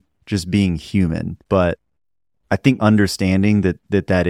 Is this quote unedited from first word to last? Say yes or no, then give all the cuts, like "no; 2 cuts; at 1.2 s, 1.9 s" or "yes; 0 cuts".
no; 2 cuts; at 1.4 s, 2.8 s